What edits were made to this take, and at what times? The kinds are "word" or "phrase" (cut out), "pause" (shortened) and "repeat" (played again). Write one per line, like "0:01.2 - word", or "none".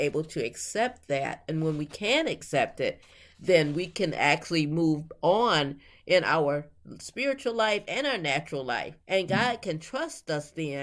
0:09.0 - pause